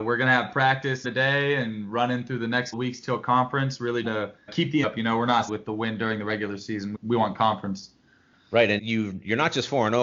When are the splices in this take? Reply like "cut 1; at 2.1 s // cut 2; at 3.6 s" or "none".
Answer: cut 1; at 1.0 s // cut 2; at 2.7 s // cut 3; at 4.0 s // cut 4; at 4.5 s // cut 5; at 4.8 s // cut 6; at 5.5 s // cut 7; at 6.9 s // cut 8; at 8.8 s